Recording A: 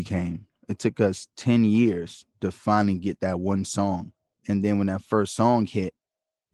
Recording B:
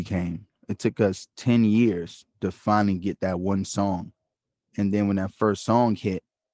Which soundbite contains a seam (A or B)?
A